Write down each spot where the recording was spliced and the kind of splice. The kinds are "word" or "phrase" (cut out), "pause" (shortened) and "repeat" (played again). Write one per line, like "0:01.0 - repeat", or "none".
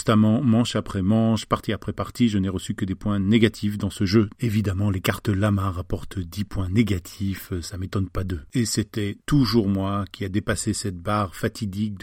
none